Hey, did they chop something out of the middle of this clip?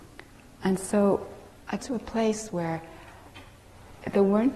yes; 1 cut; at 1.8 s

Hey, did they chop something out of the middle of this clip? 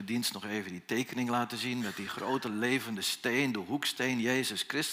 no; 0 cuts

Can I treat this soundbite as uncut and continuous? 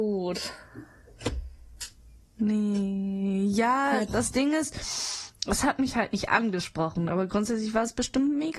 no; 1 cut; at 4.1 s

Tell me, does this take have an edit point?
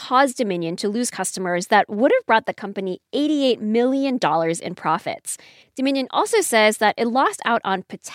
no; 0 cuts

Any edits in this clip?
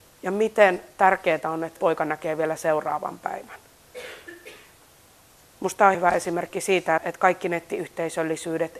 yes; 3 cuts; at 1.8 s, 5.9 s, 7.0 s

